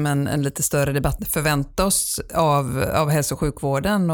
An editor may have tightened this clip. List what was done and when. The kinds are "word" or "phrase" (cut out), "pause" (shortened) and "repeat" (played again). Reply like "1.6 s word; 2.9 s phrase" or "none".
1.2 s phrase